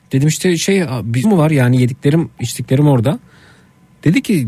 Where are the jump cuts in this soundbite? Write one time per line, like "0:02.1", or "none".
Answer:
0:01.2